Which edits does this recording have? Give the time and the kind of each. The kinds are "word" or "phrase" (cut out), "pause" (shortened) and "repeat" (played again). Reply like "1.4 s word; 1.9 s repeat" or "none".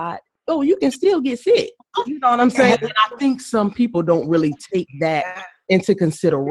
none